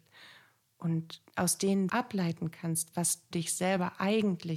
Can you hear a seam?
yes; 3 cuts; at 1.3 s, 1.9 s, 3.3 s

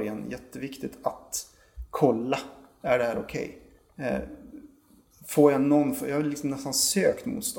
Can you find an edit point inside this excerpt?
no; 0 cuts

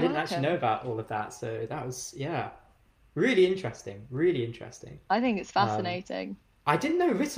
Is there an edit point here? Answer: no; 0 cuts

